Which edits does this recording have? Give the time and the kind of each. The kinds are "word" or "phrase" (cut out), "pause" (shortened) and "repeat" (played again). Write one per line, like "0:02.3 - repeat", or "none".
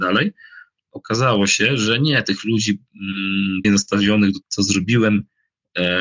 0:03.6 - word
0:04.4 - word